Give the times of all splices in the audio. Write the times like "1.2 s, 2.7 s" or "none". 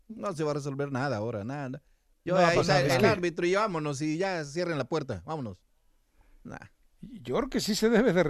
none

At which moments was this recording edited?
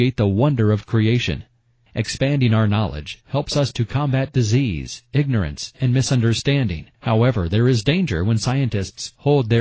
6.9 s

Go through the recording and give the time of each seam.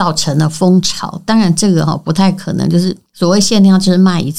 3.1 s

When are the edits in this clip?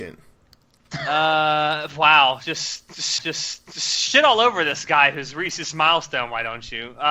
3.2 s

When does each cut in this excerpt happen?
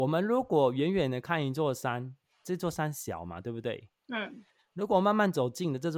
none

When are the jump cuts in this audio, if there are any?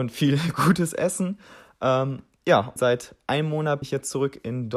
2.8 s, 3.8 s

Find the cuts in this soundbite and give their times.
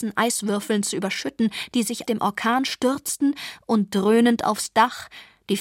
2.0 s

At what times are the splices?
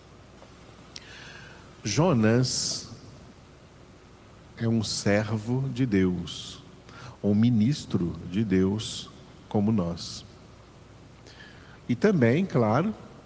none

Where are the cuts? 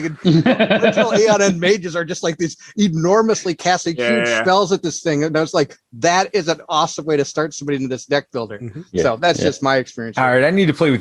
none

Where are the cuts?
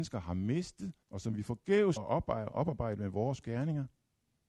1.0 s, 2.0 s, 3.4 s

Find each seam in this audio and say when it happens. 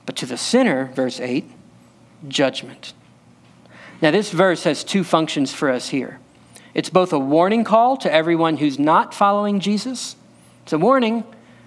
none

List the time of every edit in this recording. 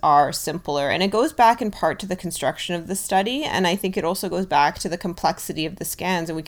none

